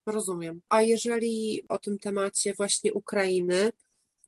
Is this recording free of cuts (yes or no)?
no